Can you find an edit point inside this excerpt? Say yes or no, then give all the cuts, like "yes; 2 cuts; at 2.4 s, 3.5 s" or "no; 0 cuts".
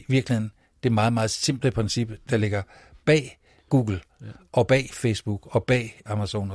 no; 0 cuts